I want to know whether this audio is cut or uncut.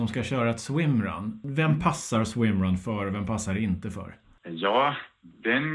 uncut